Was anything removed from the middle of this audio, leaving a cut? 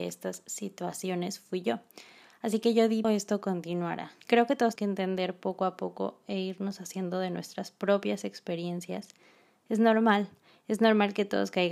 yes; 3 cuts; at 3.0 s, 4.2 s, 4.8 s

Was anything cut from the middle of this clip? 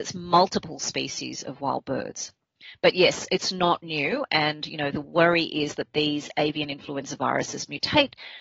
no; 0 cuts

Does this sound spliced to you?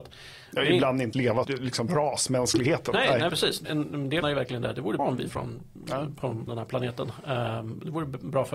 yes; 8 cuts; at 1.1 s, 1.4 s, 3.3 s, 3.6 s, 4.2 s, 5.0 s, 5.3 s, 6.5 s

